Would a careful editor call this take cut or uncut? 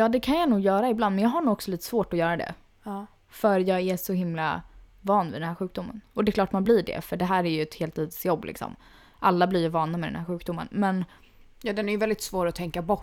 uncut